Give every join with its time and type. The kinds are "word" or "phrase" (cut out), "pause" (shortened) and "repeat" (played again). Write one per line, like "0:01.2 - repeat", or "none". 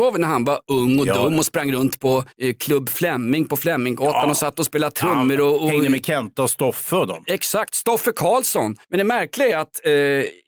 0:02.3 - pause
0:08.8 - pause